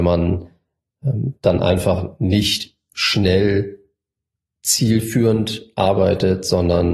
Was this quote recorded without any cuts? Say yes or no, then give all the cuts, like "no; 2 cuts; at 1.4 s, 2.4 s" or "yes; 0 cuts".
yes; 0 cuts